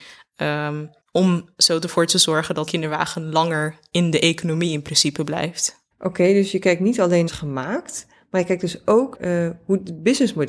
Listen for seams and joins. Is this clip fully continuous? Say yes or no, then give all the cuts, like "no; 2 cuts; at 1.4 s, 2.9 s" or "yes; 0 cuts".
no; 5 cuts; at 1.0 s, 2.7 s, 5.9 s, 7.3 s, 9.1 s